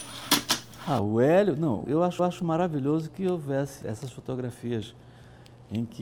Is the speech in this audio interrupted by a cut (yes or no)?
yes